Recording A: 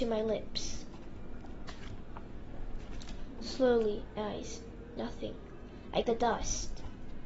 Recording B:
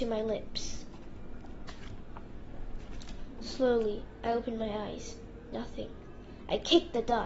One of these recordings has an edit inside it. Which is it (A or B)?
A